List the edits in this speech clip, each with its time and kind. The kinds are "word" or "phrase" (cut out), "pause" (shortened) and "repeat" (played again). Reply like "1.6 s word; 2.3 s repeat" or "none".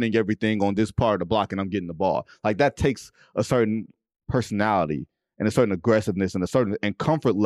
none